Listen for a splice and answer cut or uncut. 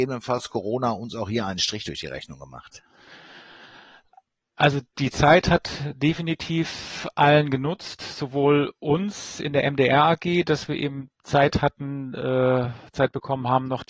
cut